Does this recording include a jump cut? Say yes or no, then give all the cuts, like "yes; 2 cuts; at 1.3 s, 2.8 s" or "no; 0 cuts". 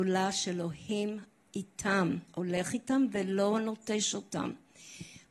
no; 0 cuts